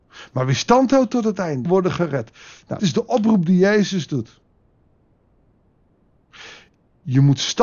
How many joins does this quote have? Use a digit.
2